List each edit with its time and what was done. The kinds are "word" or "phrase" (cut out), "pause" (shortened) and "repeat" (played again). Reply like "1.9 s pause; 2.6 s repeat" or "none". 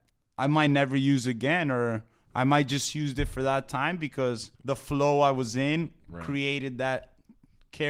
4.5 s pause